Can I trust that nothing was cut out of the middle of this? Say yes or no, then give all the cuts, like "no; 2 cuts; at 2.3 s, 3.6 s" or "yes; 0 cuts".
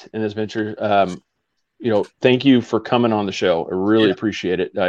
no; 1 cut; at 2.1 s